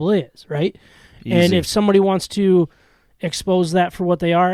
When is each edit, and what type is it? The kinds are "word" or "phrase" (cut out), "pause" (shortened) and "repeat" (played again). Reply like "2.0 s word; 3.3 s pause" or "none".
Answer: none